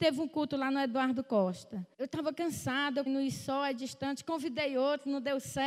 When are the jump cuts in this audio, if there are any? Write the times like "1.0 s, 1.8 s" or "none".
1.9 s, 3.1 s